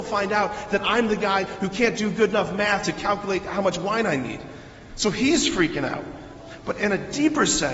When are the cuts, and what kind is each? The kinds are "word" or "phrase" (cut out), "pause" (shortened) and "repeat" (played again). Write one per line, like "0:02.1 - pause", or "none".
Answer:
none